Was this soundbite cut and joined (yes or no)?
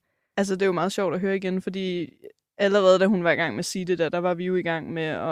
no